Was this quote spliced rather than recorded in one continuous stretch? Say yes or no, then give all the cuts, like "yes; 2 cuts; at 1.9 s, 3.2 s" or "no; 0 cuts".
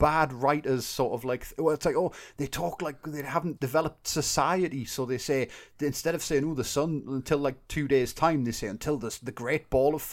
yes; 1 cut; at 3.6 s